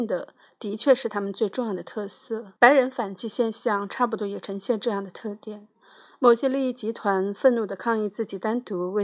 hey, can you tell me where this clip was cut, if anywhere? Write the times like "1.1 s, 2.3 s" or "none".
2.6 s